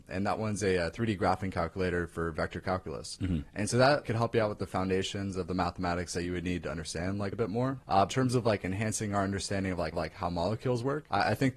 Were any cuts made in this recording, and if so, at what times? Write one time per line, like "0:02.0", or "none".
0:04.0
0:07.3
0:08.1
0:09.9

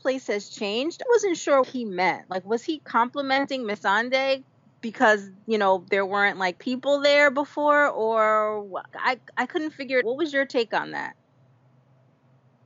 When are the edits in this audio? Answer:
0:01.1
0:01.6
0:06.6
0:08.9
0:10.0

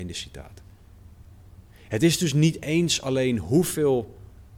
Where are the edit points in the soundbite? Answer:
0:01.7

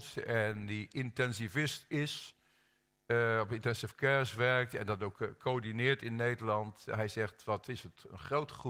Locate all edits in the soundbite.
none

